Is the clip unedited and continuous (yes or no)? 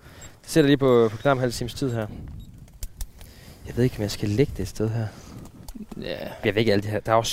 no